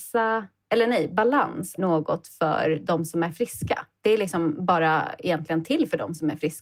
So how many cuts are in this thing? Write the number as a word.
one